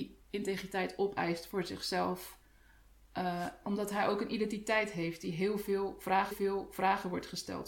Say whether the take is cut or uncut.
cut